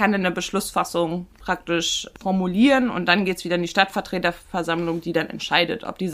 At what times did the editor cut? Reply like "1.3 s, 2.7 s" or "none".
none